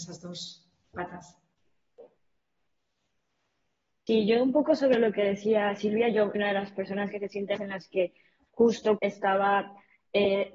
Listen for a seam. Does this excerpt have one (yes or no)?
yes